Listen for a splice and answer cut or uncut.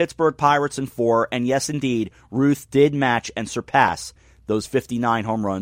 uncut